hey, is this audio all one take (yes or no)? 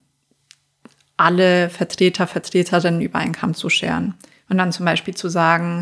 yes